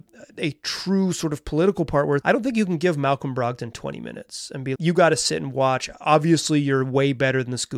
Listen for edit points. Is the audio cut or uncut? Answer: cut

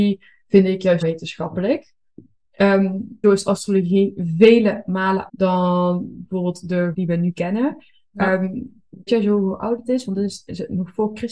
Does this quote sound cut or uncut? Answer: cut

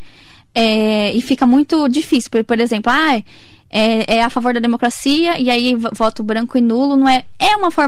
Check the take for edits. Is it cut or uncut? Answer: uncut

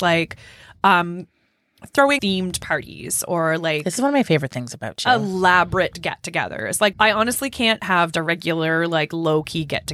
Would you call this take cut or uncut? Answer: cut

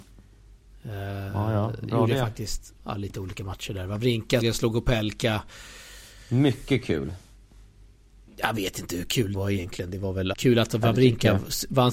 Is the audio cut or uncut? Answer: cut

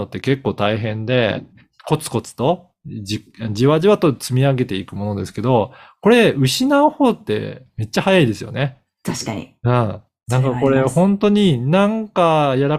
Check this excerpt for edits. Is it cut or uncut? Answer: uncut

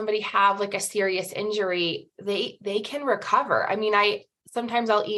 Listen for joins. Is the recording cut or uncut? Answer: uncut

